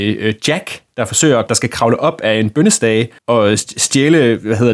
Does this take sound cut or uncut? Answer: cut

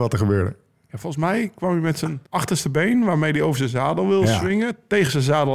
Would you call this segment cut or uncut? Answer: cut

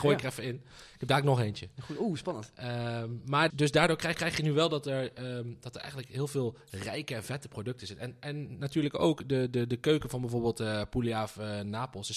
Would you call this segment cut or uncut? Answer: cut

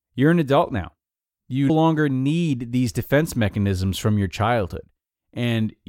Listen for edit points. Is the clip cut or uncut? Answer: cut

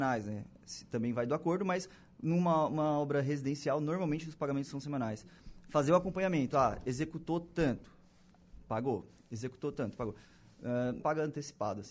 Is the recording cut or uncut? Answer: cut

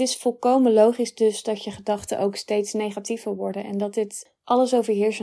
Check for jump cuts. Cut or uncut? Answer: uncut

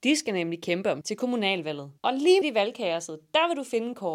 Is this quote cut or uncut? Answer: cut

